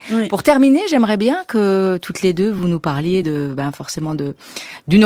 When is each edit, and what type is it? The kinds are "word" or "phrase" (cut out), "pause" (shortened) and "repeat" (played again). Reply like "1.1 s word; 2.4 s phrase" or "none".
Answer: none